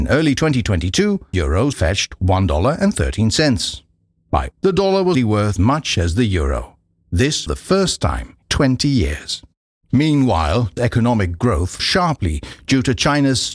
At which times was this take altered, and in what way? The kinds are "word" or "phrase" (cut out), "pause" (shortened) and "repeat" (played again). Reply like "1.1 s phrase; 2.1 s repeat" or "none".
1.3 s word; 1.7 s word; 4.5 s word; 5.1 s word; 5.6 s word; 7.5 s word; 8.4 s word; 10.8 s word; 11.8 s word